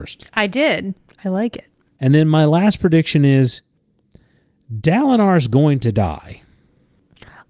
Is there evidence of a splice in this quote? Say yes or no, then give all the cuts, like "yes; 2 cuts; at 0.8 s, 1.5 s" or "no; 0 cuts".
no; 0 cuts